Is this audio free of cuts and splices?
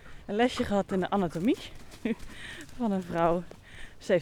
yes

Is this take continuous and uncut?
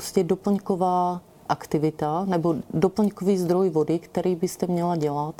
yes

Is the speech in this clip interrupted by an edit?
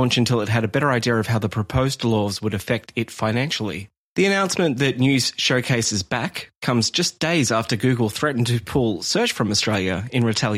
no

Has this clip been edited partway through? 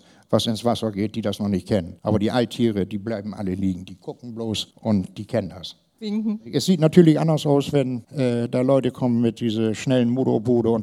yes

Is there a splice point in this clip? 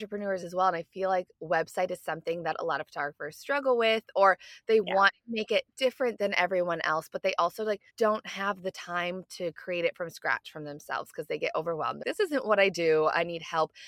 yes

